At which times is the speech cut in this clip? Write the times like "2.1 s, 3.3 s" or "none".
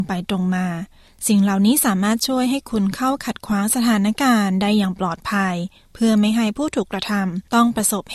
none